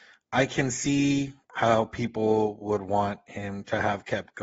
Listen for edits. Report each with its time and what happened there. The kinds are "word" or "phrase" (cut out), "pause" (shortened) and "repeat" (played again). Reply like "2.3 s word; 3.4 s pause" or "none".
1.4 s pause